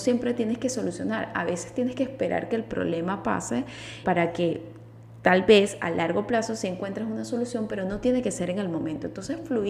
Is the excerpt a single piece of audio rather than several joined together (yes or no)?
no